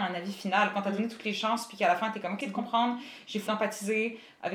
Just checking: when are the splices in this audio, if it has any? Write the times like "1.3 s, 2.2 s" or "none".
2.4 s, 3.5 s